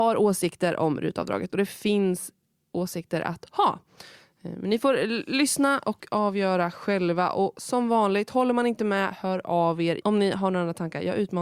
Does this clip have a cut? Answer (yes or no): no